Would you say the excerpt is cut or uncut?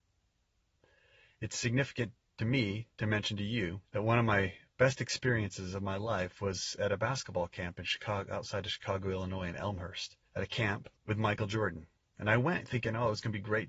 cut